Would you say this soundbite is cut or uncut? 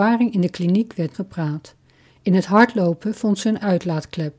cut